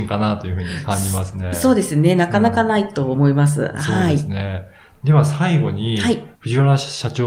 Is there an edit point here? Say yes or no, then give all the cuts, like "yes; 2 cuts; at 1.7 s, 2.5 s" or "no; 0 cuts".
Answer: yes; 1 cut; at 6.3 s